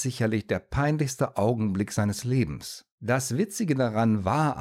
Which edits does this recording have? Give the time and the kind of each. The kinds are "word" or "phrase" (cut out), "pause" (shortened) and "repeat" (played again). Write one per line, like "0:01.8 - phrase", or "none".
0:02.9 - pause